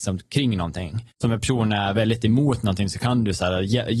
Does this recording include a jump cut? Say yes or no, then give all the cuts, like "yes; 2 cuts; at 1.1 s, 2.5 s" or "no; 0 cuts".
yes; 1 cut; at 1.1 s